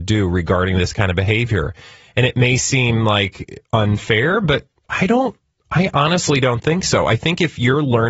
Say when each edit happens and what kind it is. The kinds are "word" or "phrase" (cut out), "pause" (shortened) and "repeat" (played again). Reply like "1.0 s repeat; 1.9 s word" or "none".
none